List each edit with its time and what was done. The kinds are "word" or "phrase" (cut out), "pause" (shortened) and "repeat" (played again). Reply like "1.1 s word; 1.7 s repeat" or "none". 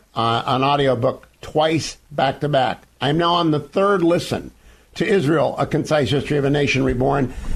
none